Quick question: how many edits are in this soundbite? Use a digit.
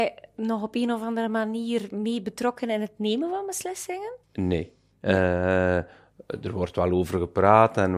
1